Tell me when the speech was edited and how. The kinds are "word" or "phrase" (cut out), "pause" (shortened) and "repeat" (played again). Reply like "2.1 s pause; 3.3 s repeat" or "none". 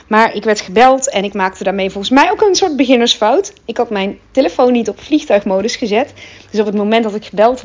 none